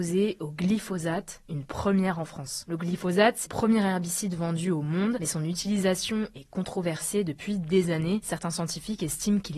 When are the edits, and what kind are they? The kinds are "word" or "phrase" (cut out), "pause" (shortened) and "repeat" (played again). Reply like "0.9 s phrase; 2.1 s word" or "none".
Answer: 3.4 s word

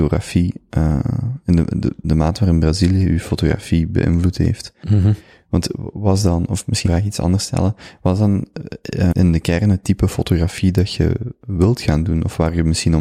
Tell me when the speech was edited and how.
2.0 s word; 6.8 s word; 9.1 s word

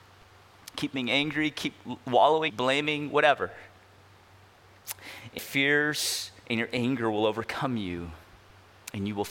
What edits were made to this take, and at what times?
2.5 s phrase; 5.4 s word

